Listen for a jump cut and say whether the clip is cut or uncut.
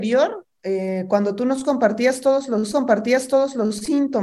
cut